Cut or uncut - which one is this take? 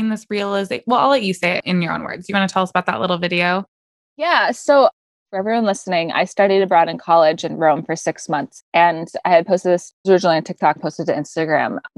cut